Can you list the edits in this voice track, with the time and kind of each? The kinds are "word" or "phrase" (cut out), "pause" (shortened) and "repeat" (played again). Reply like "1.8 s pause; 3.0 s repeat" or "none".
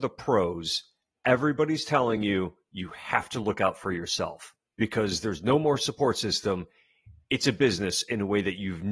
none